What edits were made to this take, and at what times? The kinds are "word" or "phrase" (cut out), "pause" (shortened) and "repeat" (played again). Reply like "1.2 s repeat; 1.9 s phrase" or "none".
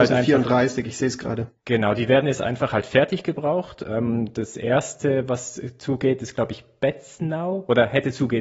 none